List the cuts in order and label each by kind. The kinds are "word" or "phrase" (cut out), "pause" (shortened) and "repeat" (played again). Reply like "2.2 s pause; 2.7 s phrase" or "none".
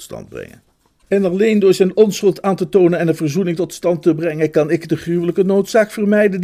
none